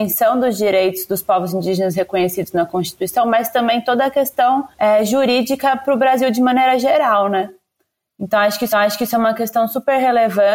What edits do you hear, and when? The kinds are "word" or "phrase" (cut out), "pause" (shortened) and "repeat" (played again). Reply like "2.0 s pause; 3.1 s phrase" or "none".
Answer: 4.7 s pause; 8.7 s repeat